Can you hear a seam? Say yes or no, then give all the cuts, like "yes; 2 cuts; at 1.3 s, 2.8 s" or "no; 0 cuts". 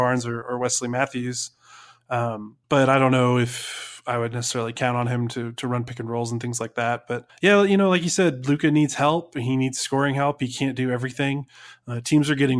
yes; 2 cuts; at 2.6 s, 7.3 s